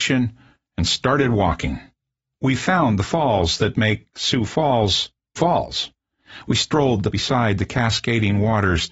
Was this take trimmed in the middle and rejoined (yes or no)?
yes